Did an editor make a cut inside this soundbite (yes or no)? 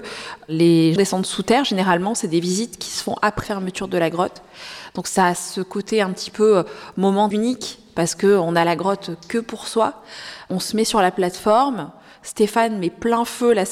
yes